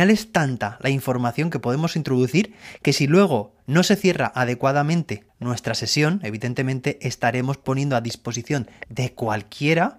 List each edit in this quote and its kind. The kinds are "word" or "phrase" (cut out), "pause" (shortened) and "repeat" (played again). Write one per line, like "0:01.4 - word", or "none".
none